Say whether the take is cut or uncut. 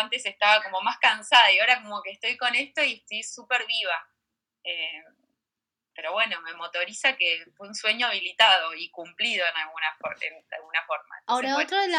uncut